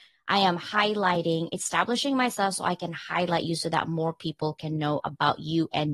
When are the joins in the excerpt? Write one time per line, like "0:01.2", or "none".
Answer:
none

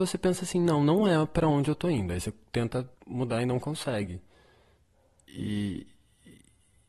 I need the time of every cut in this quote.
0:02.9

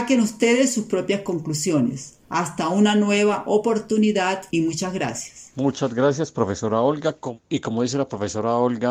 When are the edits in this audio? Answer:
0:02.2
0:04.5

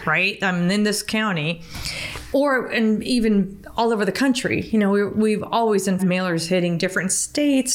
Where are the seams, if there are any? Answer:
0:06.0

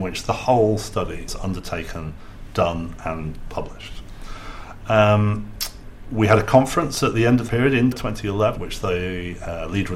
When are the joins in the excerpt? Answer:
0:01.3
0:07.5
0:07.9
0:08.6

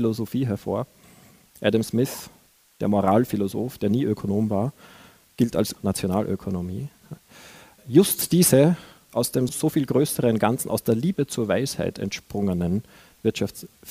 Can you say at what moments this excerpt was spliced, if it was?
0:05.8

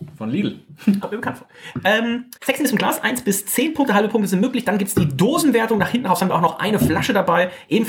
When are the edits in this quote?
0:01.0
0:02.4

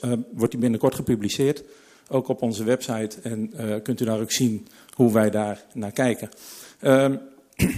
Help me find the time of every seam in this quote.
none

